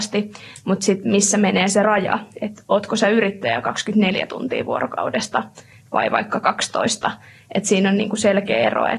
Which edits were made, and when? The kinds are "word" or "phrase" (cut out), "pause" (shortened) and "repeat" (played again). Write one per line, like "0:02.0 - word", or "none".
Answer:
none